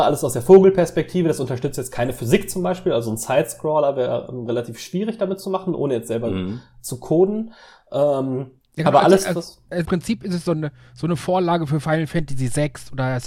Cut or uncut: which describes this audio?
cut